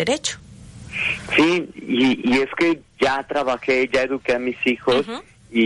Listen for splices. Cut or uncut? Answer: uncut